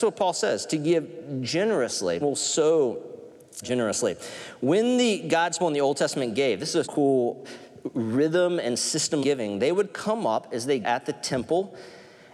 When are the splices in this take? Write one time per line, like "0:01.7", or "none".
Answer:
0:02.2
0:03.6
0:05.6
0:06.8
0:09.2
0:10.8